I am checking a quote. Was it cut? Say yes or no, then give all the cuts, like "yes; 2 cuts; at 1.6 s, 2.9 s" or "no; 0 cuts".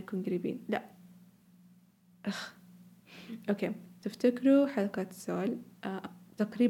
no; 0 cuts